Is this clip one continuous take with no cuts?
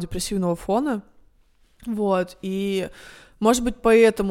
yes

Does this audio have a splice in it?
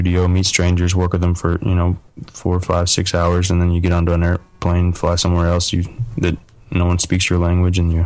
no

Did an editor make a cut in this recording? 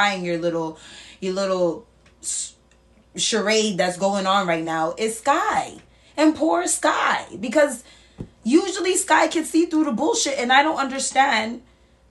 no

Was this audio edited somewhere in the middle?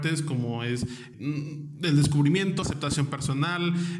yes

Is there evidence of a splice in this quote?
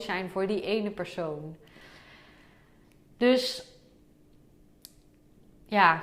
no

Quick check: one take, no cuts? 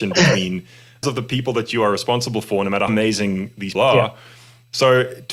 no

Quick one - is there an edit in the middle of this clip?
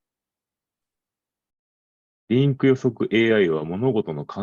no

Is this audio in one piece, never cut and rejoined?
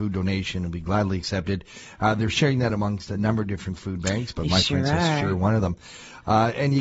yes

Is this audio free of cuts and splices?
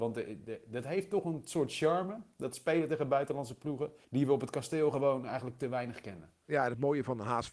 no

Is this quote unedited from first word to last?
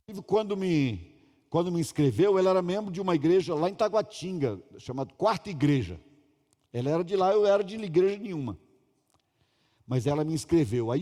yes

